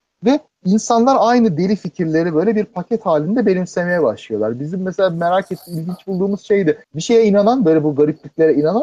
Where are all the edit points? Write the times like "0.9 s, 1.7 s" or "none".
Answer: 6.8 s